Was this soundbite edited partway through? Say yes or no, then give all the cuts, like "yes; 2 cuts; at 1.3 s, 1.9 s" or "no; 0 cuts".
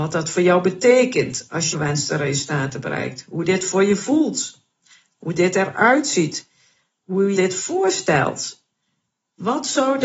yes; 2 cuts; at 1.7 s, 7.3 s